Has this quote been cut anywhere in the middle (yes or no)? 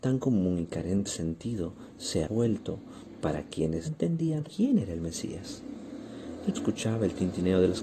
yes